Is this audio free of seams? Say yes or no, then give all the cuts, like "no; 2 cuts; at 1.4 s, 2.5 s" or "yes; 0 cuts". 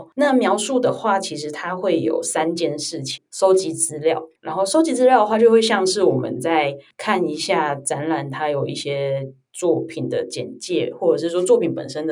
yes; 0 cuts